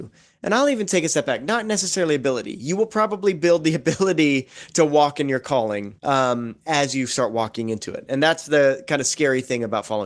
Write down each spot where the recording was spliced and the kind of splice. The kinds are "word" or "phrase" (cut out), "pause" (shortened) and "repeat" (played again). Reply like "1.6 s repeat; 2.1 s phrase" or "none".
6.0 s pause